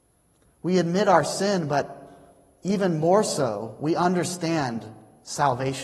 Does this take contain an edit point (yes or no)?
no